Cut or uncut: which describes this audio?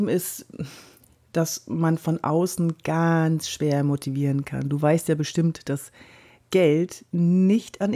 uncut